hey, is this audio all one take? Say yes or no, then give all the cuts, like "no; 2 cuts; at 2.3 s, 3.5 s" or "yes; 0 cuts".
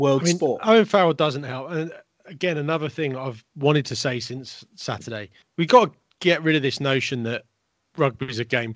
no; 1 cut; at 5.4 s